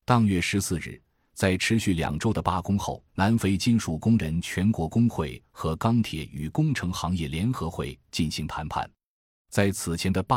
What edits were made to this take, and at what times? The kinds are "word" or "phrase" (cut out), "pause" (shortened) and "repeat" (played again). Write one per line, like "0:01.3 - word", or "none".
0:03.1 - pause